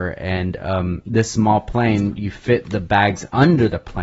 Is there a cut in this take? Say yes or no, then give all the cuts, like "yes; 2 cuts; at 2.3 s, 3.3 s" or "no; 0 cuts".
no; 0 cuts